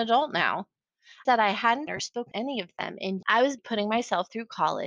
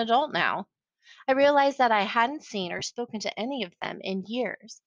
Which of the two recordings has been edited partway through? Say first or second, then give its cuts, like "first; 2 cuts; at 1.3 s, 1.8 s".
first; 5 cuts; at 1.3 s, 1.9 s, 2.3 s, 3.2 s, 3.6 s